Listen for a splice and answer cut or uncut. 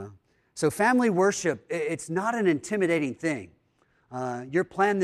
uncut